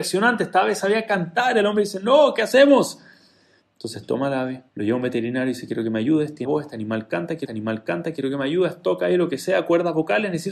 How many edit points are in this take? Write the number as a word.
three